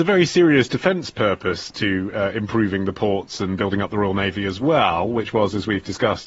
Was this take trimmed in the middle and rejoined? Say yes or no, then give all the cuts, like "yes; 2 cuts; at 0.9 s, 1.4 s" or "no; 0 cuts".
no; 0 cuts